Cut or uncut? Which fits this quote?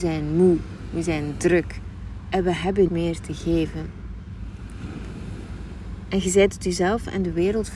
cut